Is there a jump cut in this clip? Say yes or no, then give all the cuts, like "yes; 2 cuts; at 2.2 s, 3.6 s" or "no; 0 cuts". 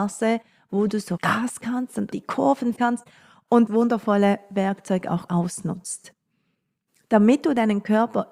yes; 6 cuts; at 1.2 s, 1.6 s, 2.1 s, 2.8 s, 3.7 s, 5.3 s